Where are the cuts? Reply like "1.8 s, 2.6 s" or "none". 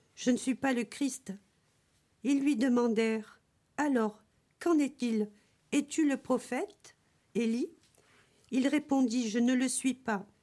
none